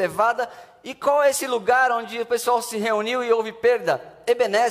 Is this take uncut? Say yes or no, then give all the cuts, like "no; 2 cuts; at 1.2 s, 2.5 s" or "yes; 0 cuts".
yes; 0 cuts